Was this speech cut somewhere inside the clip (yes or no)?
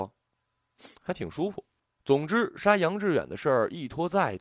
yes